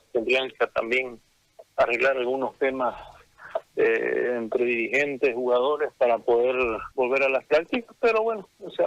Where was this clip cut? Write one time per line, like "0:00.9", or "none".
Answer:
0:06.9